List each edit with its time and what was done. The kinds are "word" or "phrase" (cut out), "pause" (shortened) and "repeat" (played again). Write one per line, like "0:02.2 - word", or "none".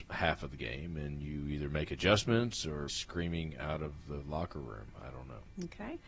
0:02.9 - phrase